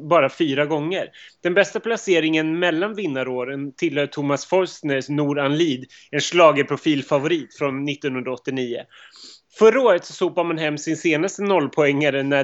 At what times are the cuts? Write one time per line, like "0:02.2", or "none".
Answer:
none